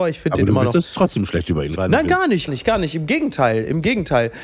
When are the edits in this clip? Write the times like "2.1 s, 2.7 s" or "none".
1.8 s, 2.5 s